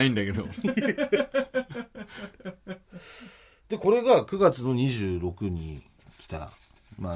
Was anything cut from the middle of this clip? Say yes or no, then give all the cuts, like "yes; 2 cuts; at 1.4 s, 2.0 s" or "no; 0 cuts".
no; 0 cuts